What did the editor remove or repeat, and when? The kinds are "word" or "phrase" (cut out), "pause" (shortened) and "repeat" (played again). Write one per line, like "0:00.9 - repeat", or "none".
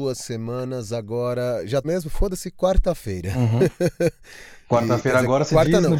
0:01.8 - word

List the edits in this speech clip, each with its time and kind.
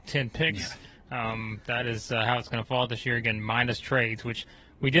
none

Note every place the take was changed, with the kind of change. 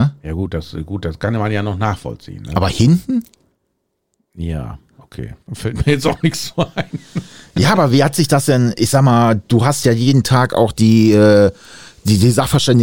0:05.4 - pause

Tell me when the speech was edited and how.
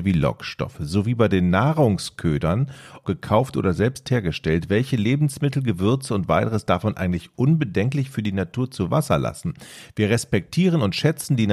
0:03.0 - word

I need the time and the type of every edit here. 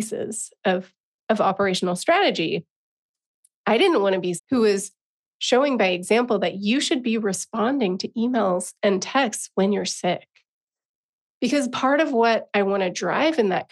0:04.4 - word

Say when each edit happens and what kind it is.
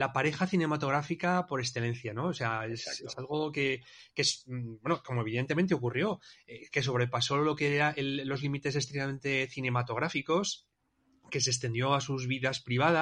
none

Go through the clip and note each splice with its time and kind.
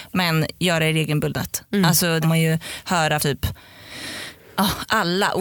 0:02.2 - phrase
0:03.2 - word

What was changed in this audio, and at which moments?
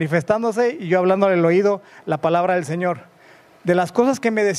none

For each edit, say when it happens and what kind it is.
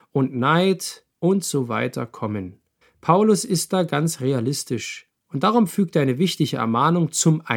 0:01.1 - pause
0:02.8 - pause

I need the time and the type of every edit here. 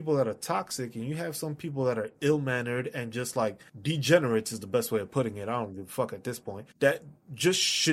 0:03.7 - pause
0:06.7 - pause

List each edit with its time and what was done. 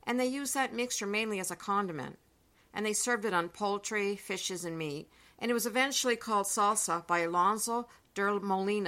none

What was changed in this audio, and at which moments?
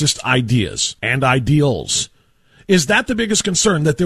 0:01.0 - pause

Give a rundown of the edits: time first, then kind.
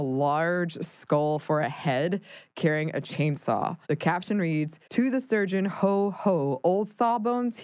0:03.8 - pause
0:04.8 - pause

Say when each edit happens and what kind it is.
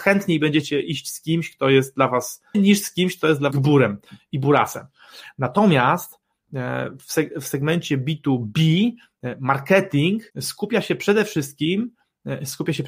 0:02.5 - word
0:03.5 - word
0:10.3 - pause

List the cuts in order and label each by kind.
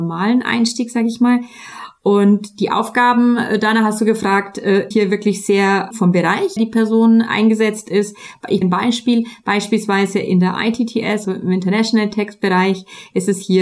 0:04.9 - word
0:05.9 - word
0:06.6 - phrase
0:08.6 - phrase
0:11.2 - word

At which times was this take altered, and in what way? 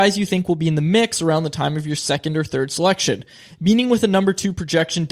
none

